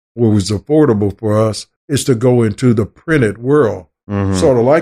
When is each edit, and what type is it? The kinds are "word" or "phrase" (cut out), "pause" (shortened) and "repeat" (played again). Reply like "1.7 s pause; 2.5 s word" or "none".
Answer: 1.8 s pause